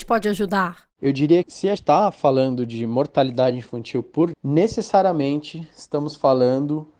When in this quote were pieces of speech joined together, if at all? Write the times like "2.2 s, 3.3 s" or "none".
1.4 s, 1.8 s, 4.3 s